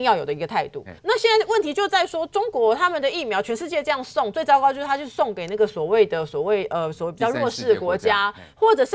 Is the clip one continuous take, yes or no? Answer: no